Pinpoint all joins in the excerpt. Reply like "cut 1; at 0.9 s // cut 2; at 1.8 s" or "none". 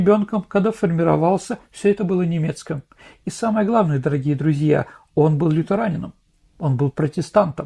none